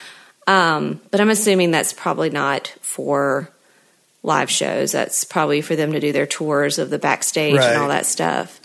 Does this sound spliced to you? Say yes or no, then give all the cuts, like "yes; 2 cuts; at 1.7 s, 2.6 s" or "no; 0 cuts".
no; 0 cuts